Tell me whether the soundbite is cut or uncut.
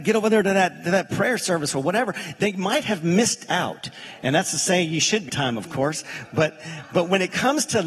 cut